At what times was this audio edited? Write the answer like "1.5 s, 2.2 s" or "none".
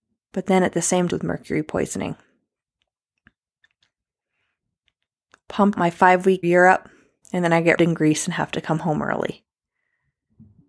1.1 s, 5.7 s, 6.4 s, 7.8 s